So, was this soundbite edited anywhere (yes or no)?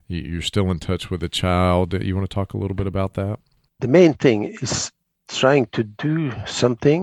no